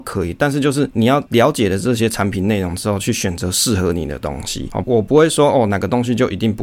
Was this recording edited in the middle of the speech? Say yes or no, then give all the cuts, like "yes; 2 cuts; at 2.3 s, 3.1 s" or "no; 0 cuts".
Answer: yes; 1 cut; at 4.8 s